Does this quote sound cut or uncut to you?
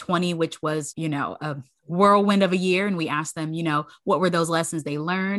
cut